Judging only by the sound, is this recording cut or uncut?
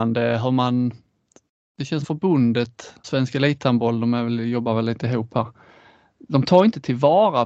cut